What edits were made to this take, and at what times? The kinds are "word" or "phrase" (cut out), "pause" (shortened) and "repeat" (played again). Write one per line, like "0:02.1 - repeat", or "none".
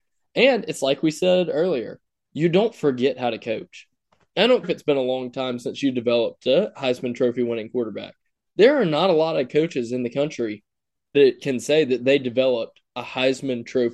0:04.6 - word
0:11.1 - word